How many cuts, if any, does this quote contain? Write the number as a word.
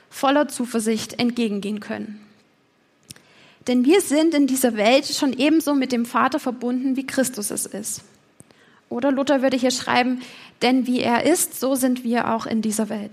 zero